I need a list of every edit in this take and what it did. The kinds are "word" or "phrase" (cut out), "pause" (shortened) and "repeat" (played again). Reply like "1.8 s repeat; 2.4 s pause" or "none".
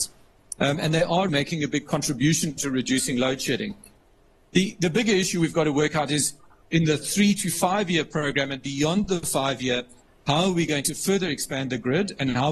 1.3 s word

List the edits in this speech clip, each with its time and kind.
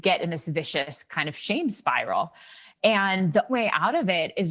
3.5 s word

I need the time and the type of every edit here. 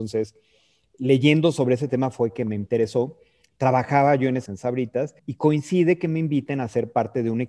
4.5 s word; 5.2 s pause

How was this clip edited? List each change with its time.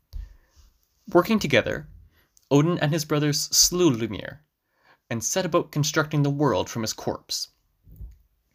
none

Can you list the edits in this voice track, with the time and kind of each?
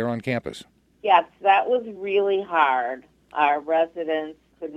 none

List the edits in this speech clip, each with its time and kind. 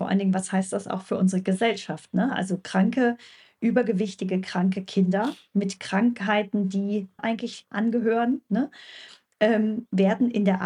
7.2 s word

